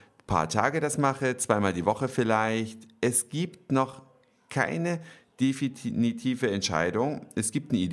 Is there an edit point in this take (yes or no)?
no